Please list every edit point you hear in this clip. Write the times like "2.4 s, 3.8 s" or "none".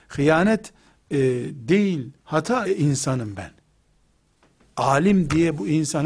2.6 s